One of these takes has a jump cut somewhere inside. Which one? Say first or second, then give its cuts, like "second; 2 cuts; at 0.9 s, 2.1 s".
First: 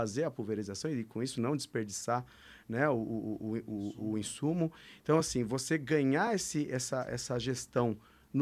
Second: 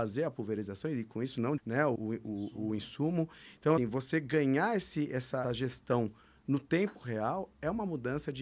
second; 4 cuts; at 1.6 s, 2.0 s, 3.8 s, 5.4 s